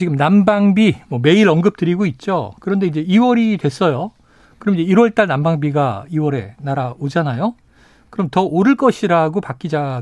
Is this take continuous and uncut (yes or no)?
yes